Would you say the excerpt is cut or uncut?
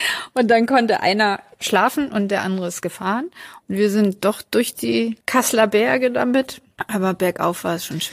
cut